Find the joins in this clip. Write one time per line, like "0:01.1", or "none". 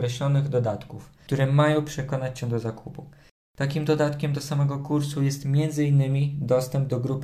none